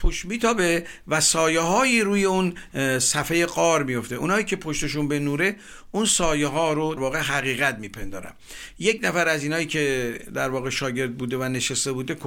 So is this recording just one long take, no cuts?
no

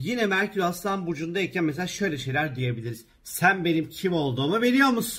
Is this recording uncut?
yes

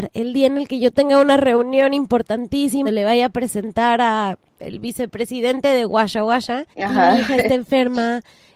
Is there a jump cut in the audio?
yes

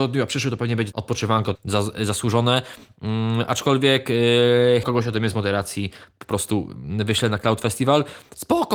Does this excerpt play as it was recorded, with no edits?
no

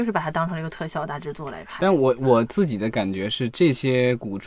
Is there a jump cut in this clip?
no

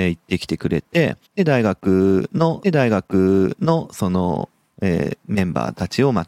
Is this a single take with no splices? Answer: no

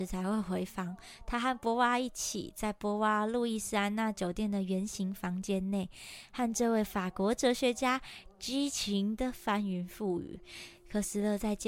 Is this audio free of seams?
yes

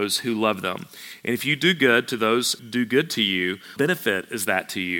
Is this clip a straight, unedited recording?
no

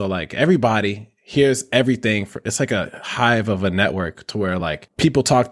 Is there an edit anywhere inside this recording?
no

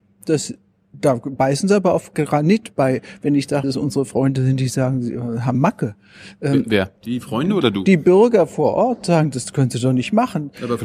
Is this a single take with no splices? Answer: no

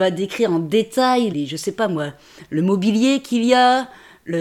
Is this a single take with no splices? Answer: no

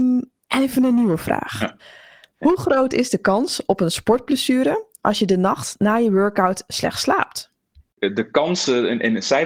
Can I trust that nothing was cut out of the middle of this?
yes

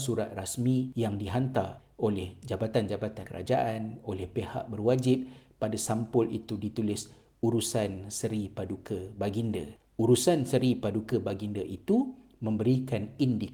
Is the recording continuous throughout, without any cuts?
yes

